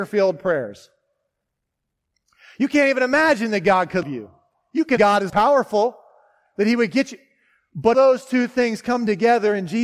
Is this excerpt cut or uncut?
cut